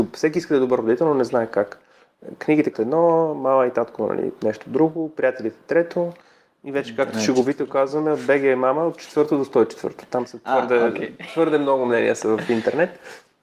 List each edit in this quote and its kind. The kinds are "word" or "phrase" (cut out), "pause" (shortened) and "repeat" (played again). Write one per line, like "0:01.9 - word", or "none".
0:02.7 - word